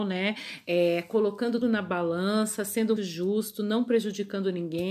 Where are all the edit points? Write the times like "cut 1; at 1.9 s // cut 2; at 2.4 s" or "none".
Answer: cut 1; at 1.6 s // cut 2; at 3.0 s